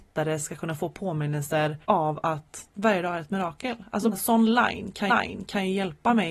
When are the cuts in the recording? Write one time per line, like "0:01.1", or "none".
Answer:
0:01.8
0:02.7
0:04.1
0:05.1